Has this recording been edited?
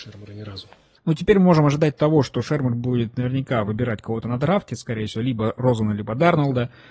no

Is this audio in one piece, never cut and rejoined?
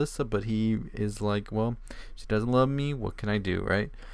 yes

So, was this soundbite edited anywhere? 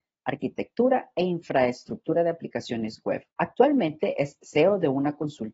yes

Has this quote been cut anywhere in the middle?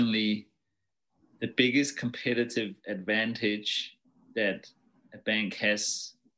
yes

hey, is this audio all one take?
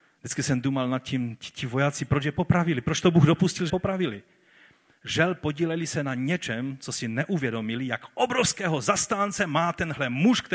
no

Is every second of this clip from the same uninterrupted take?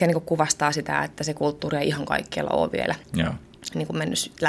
no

